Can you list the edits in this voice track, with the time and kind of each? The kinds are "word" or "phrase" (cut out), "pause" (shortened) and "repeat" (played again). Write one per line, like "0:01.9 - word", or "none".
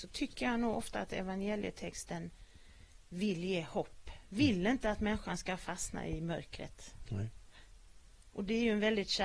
0:03.0 - pause

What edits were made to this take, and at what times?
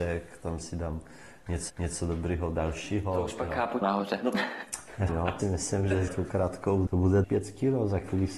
0:01.7 - repeat
0:03.8 - phrase
0:05.1 - phrase
0:05.4 - phrase
0:06.1 - word
0:06.9 - word
0:07.2 - word

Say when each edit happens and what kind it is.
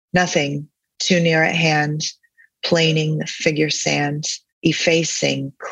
0:04.5 - pause

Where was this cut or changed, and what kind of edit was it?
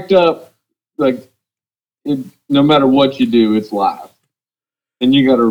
none

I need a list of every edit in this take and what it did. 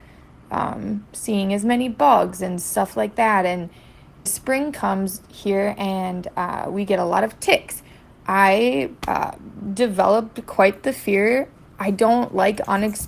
0:04.3 - word
0:09.0 - pause

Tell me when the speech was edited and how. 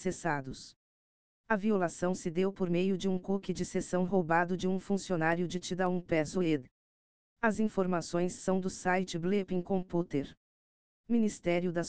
none

